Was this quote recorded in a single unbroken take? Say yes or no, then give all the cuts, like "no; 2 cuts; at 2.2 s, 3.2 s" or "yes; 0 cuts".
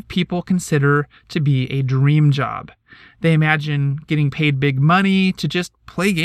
yes; 0 cuts